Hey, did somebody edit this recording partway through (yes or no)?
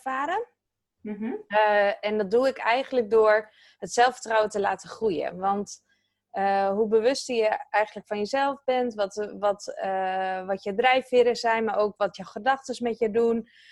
no